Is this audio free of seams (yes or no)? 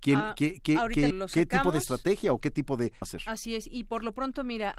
no